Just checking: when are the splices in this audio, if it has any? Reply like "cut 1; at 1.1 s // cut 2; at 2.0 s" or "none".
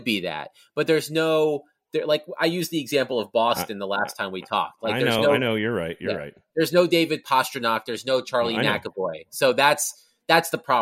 none